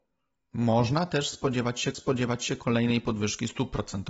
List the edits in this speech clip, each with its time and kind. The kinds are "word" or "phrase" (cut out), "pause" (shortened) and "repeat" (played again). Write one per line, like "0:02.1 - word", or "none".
0:01.9 - repeat